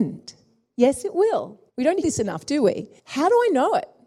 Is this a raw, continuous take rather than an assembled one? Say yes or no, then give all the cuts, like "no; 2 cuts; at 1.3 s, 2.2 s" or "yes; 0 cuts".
no; 3 cuts; at 1.7 s, 2.0 s, 3.0 s